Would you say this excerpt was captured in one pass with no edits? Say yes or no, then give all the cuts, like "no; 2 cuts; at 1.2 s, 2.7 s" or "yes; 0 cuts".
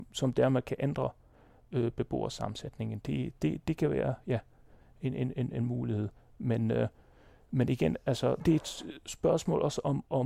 yes; 0 cuts